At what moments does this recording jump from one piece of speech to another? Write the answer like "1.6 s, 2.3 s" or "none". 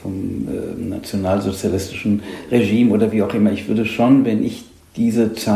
none